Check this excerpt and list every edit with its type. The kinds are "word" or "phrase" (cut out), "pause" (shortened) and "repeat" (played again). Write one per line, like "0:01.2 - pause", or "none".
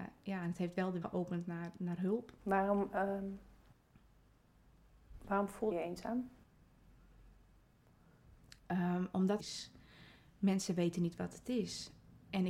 0:01.0 - word
0:01.8 - word
0:02.4 - pause
0:05.7 - word
0:08.6 - pause
0:09.4 - phrase